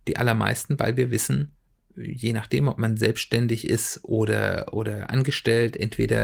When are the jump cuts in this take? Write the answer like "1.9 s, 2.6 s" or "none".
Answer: none